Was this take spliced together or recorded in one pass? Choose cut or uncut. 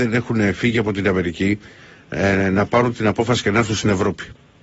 uncut